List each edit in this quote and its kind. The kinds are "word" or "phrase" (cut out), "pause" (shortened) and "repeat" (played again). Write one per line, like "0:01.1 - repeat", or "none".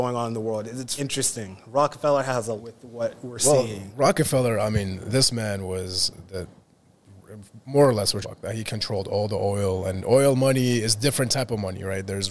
0:01.0 - word
0:02.6 - phrase
0:08.2 - word